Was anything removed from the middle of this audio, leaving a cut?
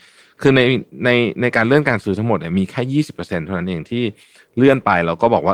no; 0 cuts

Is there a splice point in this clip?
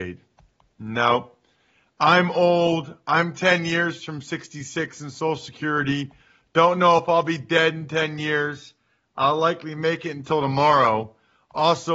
no; 0 cuts

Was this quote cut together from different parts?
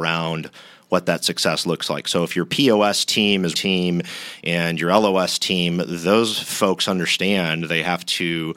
yes; 1 cut; at 3.5 s

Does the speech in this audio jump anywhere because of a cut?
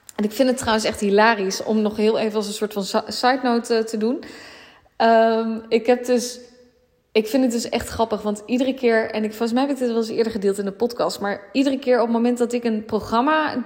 no; 0 cuts

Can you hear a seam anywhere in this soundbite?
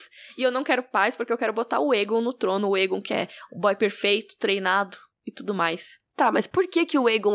no; 0 cuts

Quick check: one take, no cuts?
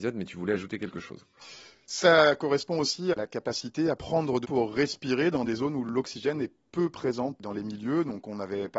no; 2 cuts; at 4.0 s, 4.4 s

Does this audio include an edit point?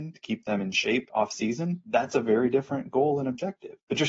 no; 0 cuts

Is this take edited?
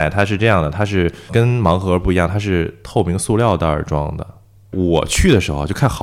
yes; 1 cut; at 1.3 s

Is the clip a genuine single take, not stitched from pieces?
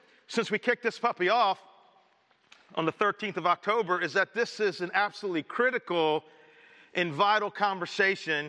yes; 0 cuts

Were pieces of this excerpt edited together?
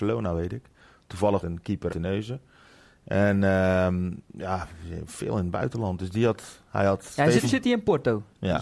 yes; 3 cuts; at 1.4 s, 1.9 s, 7.4 s

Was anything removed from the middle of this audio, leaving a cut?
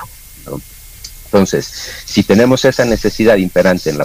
no; 0 cuts

